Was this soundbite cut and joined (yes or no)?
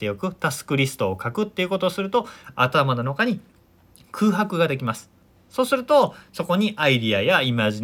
no